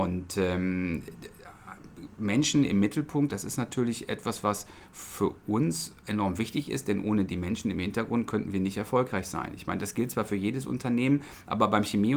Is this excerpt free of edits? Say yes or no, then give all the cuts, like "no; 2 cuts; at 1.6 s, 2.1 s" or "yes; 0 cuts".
no; 1 cut; at 6.0 s